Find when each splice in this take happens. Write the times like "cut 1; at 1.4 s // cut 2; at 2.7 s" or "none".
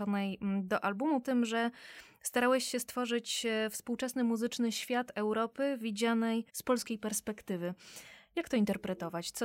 cut 1; at 1.2 s // cut 2; at 6.5 s